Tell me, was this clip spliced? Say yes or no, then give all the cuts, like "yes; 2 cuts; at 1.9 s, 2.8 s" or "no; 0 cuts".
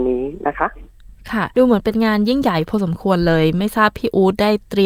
no; 0 cuts